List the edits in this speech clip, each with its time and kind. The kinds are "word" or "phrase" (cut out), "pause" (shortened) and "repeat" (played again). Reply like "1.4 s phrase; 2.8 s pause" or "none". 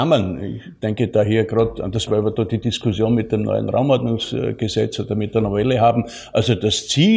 2.1 s word